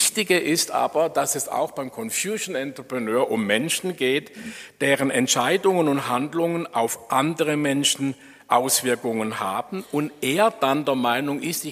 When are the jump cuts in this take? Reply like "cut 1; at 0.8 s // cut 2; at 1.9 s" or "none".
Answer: none

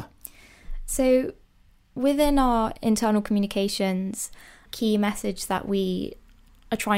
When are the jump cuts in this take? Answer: cut 1; at 4.7 s

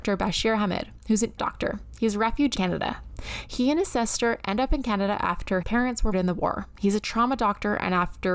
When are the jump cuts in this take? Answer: cut 1; at 1.4 s // cut 2; at 2.5 s // cut 3; at 5.6 s // cut 4; at 6.1 s

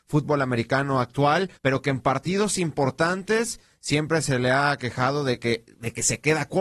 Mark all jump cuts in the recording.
cut 1; at 1.6 s

